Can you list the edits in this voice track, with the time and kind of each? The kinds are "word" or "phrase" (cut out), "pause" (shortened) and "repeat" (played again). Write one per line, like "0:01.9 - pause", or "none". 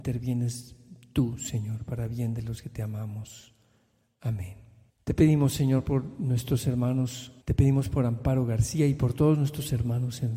0:04.9 - pause
0:07.4 - pause